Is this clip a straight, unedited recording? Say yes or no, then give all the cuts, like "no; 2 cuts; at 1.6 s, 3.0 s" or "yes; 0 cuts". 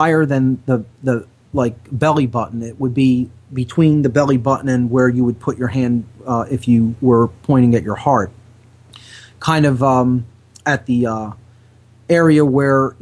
yes; 0 cuts